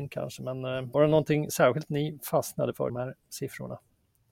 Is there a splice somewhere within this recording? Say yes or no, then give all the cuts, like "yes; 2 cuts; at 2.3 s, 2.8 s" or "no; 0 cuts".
yes; 2 cuts; at 0.9 s, 2.9 s